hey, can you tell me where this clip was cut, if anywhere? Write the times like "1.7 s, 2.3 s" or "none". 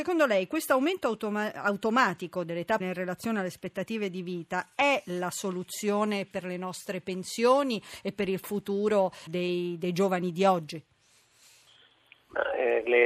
2.8 s, 9.3 s